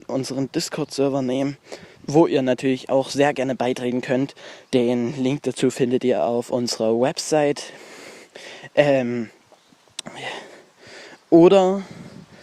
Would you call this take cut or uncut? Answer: cut